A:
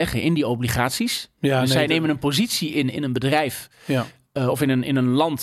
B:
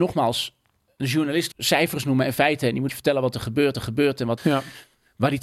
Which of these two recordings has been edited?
B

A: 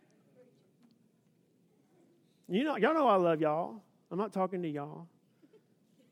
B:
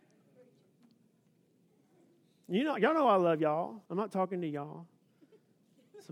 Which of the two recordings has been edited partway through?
B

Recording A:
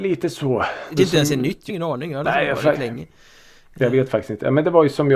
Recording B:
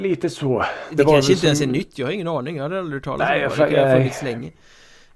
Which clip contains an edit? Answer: A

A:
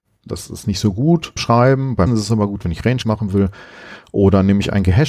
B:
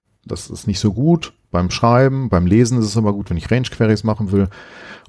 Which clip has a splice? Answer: A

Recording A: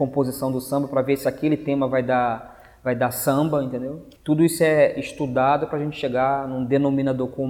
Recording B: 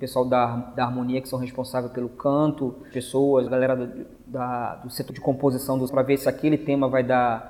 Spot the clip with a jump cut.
B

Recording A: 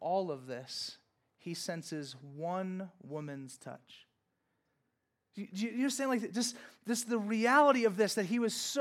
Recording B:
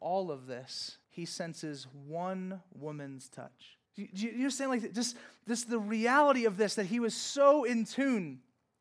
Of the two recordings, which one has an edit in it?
B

